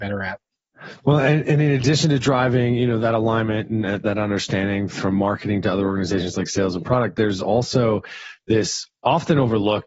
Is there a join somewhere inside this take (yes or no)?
no